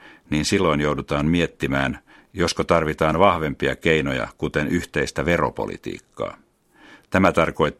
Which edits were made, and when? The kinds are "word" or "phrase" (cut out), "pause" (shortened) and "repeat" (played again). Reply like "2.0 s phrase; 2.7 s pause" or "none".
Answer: none